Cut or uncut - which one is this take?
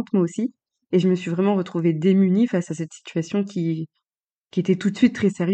uncut